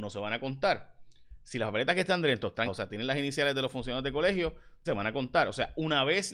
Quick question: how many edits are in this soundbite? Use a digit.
2